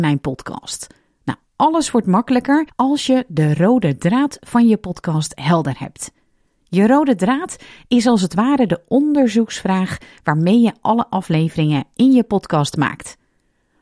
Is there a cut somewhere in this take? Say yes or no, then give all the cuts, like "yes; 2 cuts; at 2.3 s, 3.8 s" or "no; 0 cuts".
no; 0 cuts